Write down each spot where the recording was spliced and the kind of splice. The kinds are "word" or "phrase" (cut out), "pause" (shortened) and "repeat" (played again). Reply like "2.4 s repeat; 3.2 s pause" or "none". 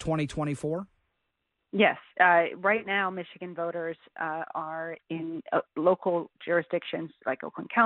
5.0 s word

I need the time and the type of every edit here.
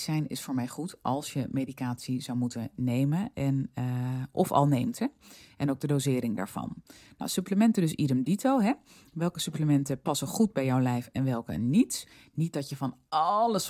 none

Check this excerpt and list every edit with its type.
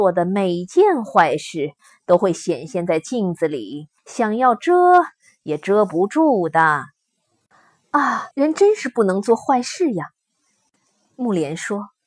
4.0 s pause; 8.3 s pause

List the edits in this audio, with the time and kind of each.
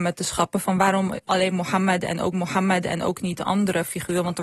2.3 s repeat

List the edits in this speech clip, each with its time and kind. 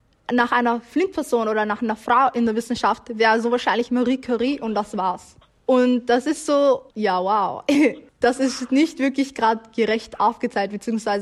5.4 s pause; 6.9 s pause; 8.1 s pause

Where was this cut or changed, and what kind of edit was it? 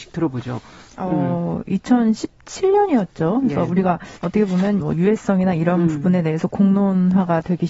4.2 s pause; 4.8 s phrase

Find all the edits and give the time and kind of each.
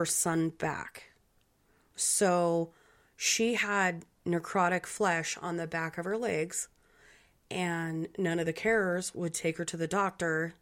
none

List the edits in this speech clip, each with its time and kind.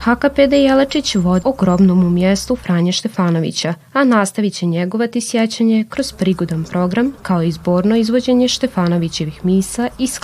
1.4 s word; 3.8 s pause

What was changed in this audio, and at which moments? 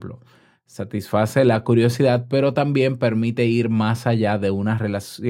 none

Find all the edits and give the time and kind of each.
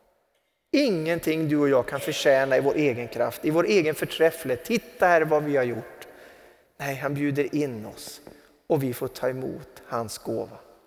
none

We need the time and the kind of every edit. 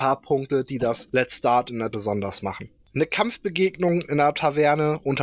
1.9 s word

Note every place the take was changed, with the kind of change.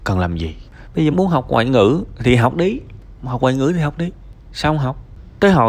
1.1 s word

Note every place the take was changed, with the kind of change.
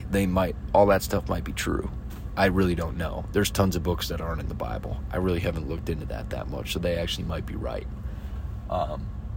none

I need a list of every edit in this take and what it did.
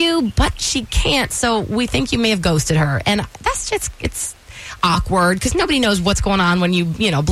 3.7 s word

